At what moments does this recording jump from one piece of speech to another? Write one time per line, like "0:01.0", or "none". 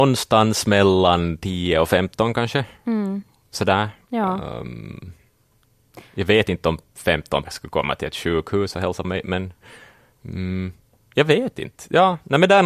0:07.4
0:09.0